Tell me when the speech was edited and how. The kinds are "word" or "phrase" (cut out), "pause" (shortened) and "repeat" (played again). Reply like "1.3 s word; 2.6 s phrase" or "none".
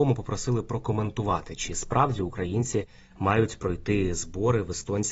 none